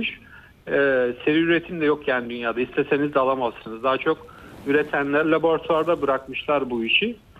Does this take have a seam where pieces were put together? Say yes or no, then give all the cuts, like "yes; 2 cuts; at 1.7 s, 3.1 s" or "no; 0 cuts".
yes; 1 cut; at 5.2 s